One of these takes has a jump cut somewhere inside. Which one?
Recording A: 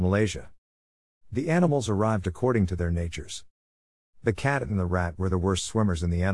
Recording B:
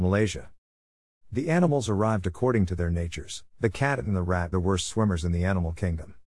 B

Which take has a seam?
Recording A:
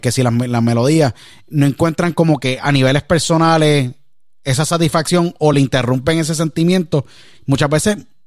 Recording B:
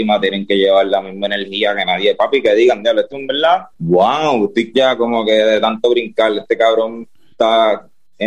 B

